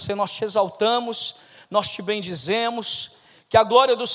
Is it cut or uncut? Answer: uncut